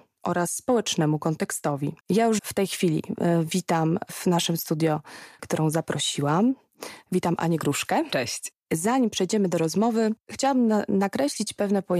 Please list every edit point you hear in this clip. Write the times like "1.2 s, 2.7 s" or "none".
2.0 s, 2.4 s, 5.4 s